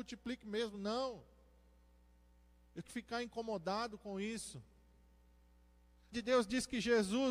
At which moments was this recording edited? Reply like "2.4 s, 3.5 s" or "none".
2.8 s, 6.1 s